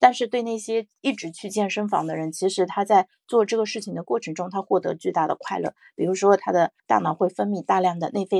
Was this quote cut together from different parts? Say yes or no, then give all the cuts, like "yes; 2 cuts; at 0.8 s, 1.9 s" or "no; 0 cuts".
yes; 1 cut; at 6.8 s